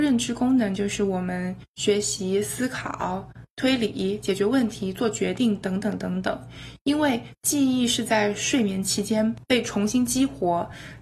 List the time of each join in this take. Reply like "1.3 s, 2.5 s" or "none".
none